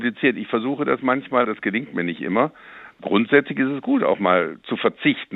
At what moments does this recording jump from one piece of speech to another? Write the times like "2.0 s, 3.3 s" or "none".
1.4 s